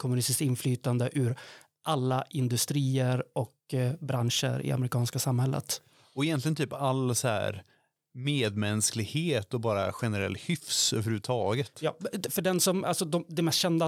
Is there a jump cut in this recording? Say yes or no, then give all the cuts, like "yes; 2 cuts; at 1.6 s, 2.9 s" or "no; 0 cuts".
no; 0 cuts